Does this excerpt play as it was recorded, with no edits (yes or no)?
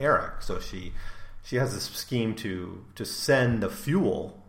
yes